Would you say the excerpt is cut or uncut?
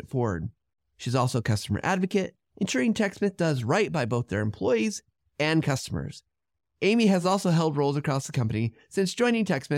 uncut